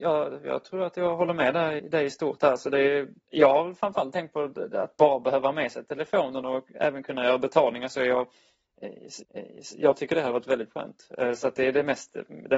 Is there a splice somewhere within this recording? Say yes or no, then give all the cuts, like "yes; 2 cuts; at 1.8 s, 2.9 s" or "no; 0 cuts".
yes; 3 cuts; at 1.8 s, 3.2 s, 9.2 s